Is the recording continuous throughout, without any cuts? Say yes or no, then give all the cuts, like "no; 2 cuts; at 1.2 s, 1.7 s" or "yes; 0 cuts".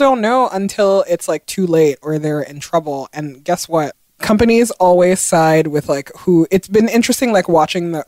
yes; 0 cuts